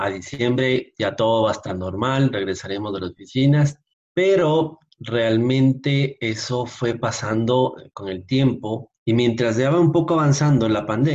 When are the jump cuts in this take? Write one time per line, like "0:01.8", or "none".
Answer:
0:03.9
0:09.0